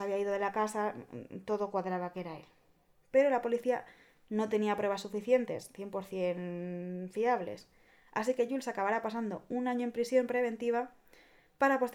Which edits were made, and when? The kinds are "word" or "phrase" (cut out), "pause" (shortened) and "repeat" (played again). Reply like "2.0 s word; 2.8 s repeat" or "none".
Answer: none